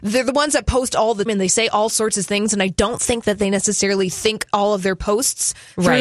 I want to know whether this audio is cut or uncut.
cut